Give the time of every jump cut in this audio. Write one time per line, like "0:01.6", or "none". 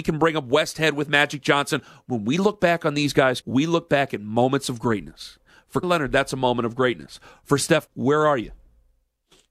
0:03.4
0:05.8
0:07.9